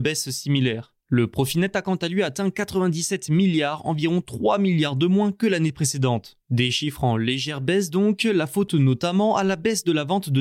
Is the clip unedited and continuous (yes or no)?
no